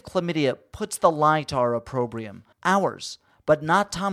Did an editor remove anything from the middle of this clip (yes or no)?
yes